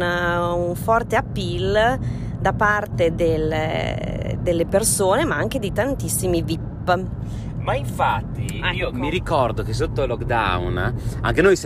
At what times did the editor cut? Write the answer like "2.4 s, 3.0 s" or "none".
none